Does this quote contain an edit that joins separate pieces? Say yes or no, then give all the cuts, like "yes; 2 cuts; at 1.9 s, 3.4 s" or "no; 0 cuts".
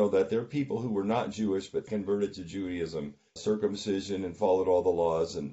yes; 2 cuts; at 1.9 s, 3.4 s